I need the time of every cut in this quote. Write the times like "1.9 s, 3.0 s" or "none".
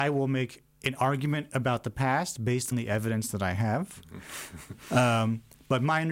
2.7 s